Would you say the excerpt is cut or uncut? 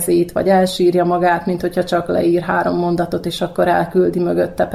uncut